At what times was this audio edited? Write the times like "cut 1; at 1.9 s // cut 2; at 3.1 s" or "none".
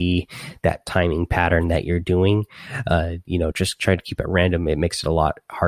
none